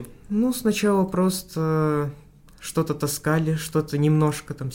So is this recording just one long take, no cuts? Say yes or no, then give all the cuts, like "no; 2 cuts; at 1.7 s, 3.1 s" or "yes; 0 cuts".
yes; 0 cuts